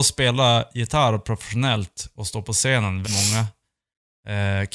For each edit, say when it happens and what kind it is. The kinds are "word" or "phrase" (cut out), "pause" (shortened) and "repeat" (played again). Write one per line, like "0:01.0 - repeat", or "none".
0:03.0 - word